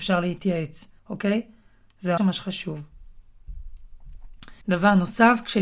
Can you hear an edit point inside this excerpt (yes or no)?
yes